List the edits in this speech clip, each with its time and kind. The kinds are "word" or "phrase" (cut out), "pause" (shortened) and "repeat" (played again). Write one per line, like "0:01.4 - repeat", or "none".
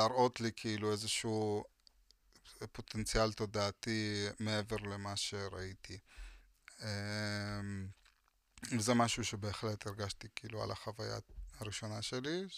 none